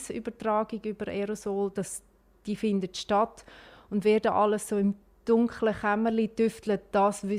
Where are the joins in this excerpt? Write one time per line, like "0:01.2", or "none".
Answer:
none